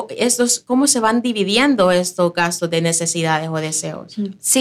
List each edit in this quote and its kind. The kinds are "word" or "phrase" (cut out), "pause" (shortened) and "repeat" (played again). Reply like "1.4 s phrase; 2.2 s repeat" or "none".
none